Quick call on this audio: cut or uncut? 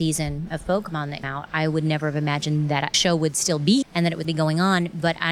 cut